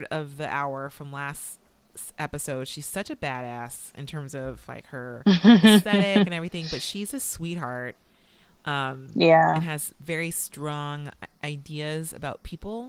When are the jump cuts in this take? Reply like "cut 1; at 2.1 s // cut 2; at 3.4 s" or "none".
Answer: none